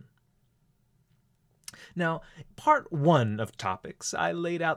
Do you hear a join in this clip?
yes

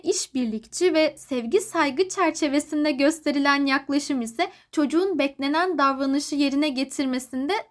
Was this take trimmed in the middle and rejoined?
no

